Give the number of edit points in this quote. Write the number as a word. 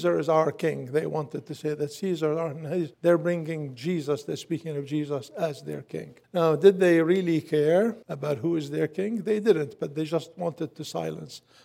three